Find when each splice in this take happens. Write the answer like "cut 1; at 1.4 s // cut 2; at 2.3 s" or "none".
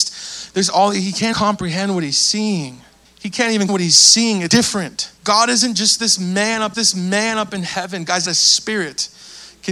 cut 1; at 1.3 s // cut 2; at 3.0 s // cut 3; at 3.7 s // cut 4; at 4.5 s // cut 5; at 5.2 s // cut 6; at 6.7 s // cut 7; at 8.3 s